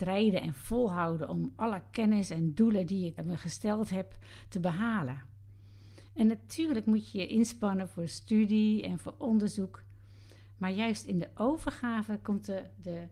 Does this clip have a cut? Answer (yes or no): yes